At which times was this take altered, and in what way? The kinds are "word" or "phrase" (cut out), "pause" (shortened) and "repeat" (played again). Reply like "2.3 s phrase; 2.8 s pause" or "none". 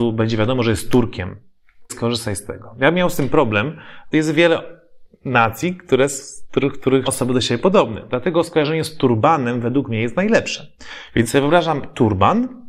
1.9 s word; 4.1 s word; 7.0 s word